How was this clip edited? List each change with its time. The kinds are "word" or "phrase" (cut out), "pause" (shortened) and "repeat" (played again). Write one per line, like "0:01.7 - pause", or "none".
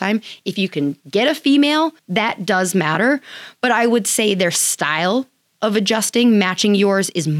0:01.0 - pause
0:02.0 - pause